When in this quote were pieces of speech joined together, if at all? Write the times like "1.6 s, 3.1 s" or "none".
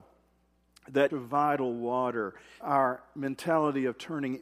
1.1 s, 2.6 s